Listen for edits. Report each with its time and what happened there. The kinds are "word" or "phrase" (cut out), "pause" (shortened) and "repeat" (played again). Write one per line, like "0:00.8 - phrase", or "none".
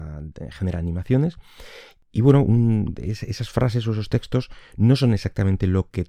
none